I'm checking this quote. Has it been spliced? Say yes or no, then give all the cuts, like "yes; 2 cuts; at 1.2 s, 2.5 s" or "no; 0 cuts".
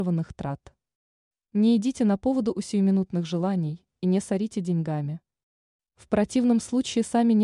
no; 0 cuts